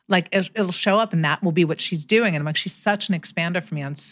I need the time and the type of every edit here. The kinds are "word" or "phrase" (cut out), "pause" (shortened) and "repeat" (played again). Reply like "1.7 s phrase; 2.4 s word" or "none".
none